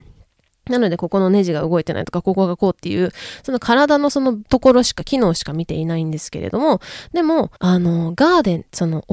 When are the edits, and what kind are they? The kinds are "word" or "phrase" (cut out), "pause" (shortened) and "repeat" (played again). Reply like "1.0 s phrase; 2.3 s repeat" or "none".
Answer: 4.5 s pause; 7.6 s pause